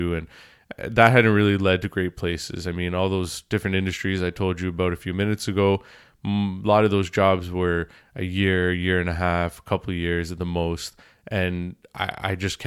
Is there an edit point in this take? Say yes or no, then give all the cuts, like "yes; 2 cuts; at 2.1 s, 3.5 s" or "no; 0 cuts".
no; 0 cuts